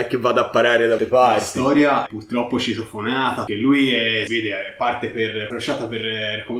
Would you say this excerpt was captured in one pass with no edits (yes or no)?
no